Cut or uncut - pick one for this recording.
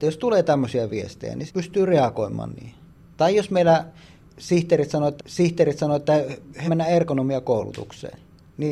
cut